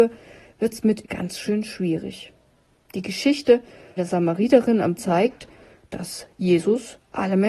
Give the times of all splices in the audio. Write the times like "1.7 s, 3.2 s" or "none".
1.0 s, 4.0 s, 5.0 s